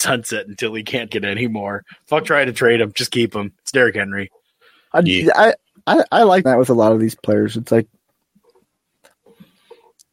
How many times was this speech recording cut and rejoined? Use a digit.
2